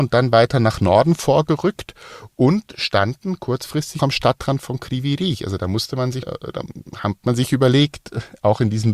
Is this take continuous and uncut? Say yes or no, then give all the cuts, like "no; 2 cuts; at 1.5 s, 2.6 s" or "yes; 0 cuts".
no; 2 cuts; at 4.0 s, 6.2 s